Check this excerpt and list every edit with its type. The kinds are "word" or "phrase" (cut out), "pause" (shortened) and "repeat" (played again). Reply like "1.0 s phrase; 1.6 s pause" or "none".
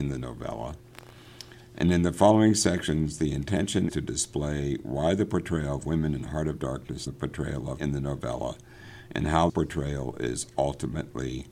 3.9 s word; 7.1 s phrase; 7.8 s word; 9.5 s word